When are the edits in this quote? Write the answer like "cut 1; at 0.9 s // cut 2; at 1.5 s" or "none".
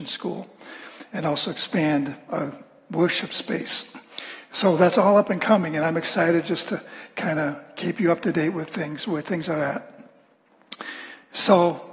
none